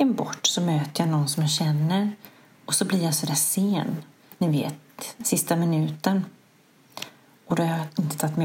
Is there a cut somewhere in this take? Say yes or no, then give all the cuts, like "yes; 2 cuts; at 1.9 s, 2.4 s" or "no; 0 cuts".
no; 0 cuts